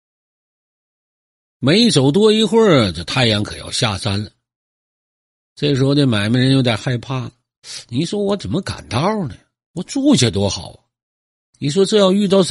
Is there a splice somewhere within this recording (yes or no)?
no